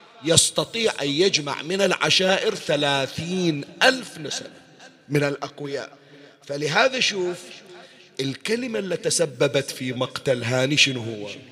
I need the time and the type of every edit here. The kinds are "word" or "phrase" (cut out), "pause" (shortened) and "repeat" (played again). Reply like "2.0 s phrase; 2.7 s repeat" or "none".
none